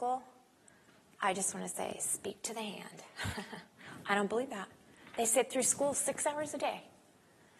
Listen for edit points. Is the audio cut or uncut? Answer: uncut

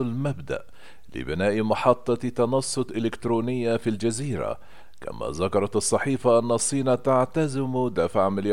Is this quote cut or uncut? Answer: uncut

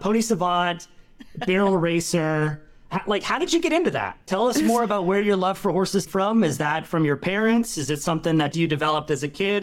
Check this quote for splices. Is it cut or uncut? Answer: cut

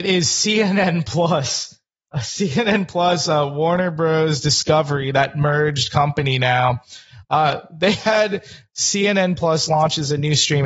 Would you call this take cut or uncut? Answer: uncut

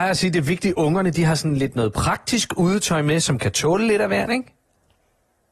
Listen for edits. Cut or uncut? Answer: uncut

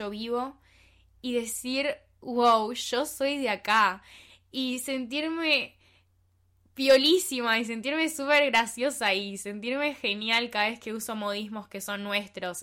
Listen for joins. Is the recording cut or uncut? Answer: uncut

